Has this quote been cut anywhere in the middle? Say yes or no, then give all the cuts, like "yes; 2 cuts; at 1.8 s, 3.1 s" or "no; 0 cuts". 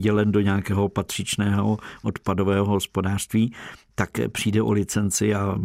yes; 1 cut; at 2.0 s